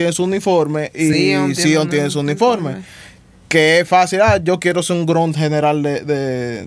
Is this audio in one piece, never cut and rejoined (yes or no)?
yes